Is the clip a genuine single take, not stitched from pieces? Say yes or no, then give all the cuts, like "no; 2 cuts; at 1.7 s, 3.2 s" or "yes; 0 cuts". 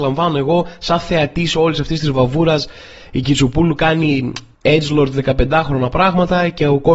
yes; 0 cuts